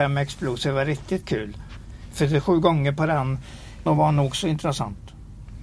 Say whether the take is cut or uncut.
cut